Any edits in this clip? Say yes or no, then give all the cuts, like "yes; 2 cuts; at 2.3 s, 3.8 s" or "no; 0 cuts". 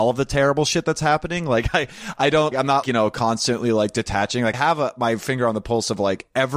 yes; 3 cuts; at 2.5 s, 2.8 s, 4.5 s